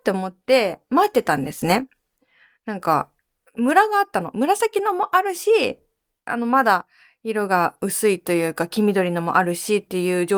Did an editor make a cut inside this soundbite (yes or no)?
no